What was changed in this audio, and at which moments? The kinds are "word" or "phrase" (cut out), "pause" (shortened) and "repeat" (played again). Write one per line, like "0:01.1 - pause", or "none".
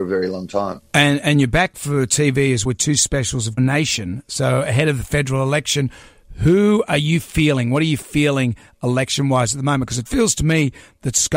0:02.7 - word
0:03.6 - word
0:10.1 - word